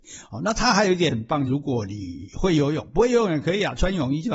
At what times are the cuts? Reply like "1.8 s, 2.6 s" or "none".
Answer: 1.5 s